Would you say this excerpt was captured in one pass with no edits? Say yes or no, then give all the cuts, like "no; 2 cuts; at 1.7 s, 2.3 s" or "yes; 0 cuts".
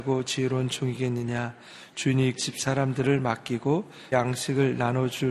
no; 2 cuts; at 2.4 s, 4.1 s